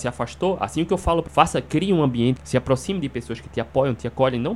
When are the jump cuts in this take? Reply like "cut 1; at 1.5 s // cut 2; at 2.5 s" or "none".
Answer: cut 1; at 1.3 s // cut 2; at 2.4 s